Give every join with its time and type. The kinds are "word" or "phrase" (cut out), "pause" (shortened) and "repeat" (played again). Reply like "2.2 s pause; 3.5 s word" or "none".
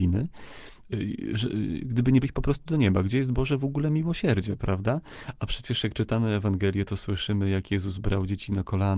2.2 s word